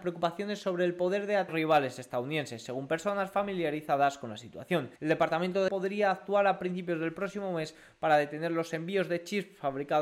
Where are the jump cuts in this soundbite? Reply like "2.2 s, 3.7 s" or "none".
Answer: 1.5 s, 5.0 s, 5.7 s